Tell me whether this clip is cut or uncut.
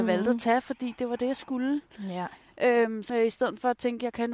cut